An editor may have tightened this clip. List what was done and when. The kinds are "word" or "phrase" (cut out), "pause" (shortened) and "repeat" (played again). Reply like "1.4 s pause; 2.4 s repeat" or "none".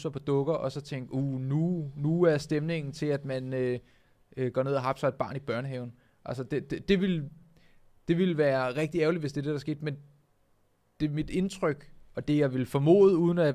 none